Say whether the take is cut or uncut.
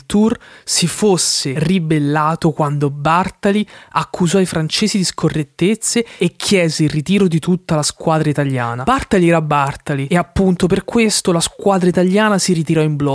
uncut